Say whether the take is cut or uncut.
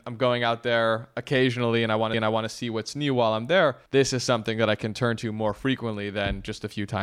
cut